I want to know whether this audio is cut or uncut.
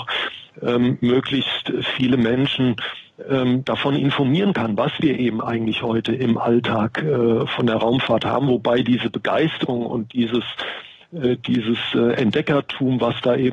uncut